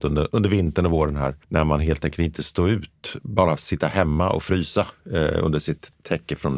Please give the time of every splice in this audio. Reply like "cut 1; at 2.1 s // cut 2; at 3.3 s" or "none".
cut 1; at 3.2 s